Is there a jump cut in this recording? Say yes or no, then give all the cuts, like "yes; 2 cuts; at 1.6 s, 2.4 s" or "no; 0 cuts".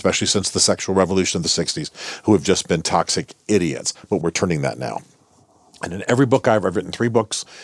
no; 0 cuts